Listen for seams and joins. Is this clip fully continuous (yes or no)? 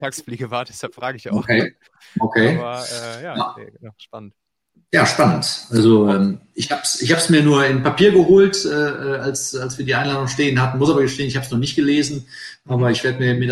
yes